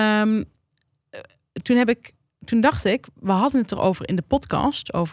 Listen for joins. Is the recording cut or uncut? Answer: uncut